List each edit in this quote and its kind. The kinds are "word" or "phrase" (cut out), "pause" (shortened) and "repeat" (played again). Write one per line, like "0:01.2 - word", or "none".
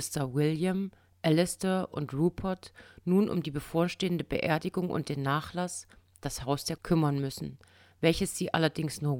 0:06.8 - word